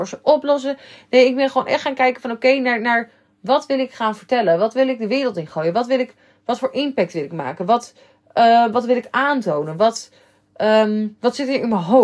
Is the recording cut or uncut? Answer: uncut